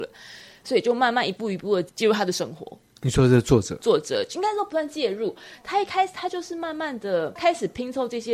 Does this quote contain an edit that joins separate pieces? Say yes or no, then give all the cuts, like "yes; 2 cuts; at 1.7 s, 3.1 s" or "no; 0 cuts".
no; 0 cuts